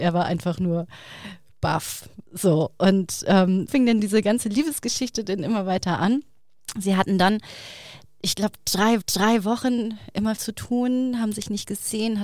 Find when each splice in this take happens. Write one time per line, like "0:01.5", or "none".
0:02.3
0:03.7
0:09.0
0:10.4